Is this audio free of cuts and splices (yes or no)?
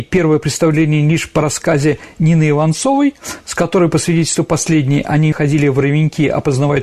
no